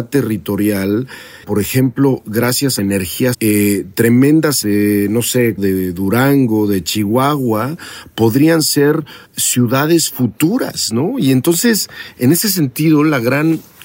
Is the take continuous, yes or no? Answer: no